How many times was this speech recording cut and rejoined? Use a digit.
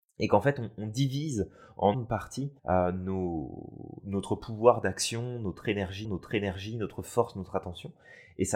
4